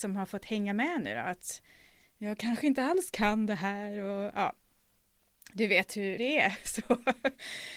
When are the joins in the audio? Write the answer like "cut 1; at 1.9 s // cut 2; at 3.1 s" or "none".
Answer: cut 1; at 6.2 s